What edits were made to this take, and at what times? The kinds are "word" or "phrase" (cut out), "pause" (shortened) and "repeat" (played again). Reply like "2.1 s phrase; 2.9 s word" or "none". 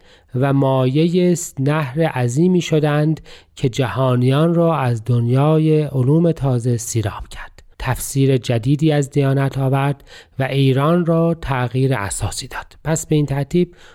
7.7 s pause